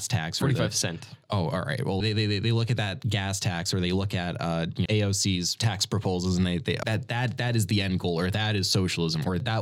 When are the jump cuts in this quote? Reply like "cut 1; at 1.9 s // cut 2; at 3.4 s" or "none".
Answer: cut 1; at 1.2 s // cut 2; at 2.0 s // cut 3; at 4.9 s // cut 4; at 6.8 s